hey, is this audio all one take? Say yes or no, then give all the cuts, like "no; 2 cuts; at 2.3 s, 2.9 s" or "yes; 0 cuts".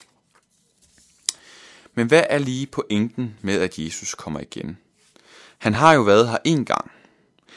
yes; 0 cuts